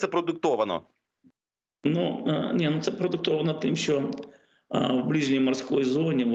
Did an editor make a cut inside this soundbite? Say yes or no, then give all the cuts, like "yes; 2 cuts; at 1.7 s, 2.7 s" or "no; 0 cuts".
no; 0 cuts